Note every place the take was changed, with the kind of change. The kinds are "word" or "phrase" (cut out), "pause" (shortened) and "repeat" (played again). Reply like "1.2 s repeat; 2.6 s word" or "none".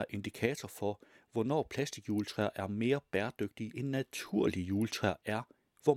none